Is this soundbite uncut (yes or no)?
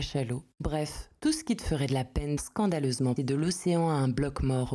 no